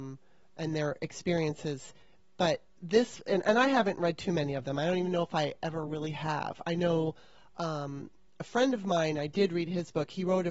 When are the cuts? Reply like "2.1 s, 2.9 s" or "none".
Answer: none